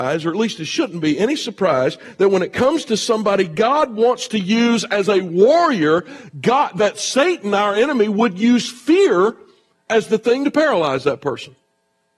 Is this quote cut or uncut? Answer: uncut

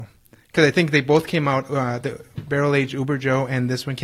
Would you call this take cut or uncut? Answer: uncut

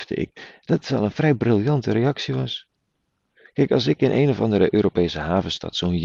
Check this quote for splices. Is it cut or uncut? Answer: uncut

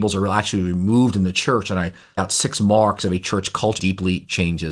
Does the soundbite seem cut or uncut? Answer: cut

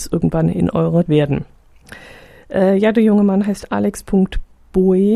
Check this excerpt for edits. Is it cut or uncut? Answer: cut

